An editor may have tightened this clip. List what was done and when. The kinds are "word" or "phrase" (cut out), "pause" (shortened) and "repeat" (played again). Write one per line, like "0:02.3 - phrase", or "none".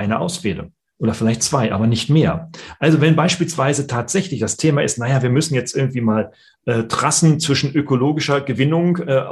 none